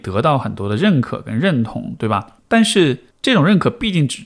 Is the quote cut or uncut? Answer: cut